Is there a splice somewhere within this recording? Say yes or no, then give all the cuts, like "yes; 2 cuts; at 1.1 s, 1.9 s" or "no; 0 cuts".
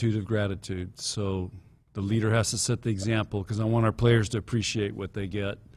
no; 0 cuts